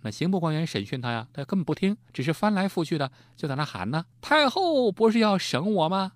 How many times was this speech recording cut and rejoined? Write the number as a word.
two